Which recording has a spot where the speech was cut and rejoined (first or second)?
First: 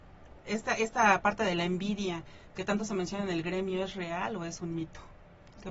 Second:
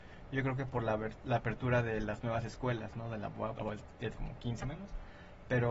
second